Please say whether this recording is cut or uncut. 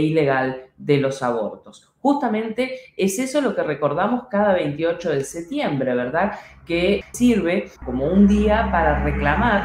cut